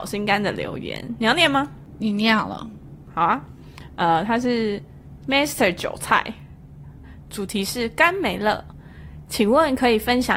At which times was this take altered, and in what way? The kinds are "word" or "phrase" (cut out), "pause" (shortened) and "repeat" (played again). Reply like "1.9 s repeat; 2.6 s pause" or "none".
none